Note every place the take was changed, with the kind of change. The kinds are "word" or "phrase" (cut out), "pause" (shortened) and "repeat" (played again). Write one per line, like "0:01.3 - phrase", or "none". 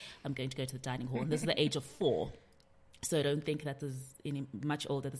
0:03.8 - word